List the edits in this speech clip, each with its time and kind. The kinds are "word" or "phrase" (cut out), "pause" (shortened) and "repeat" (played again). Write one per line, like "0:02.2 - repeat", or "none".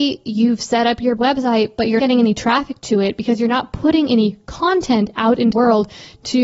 0:01.2 - word
0:02.0 - word
0:05.5 - word